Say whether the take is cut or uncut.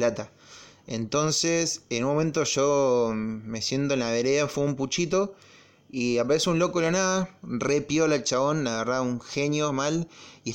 uncut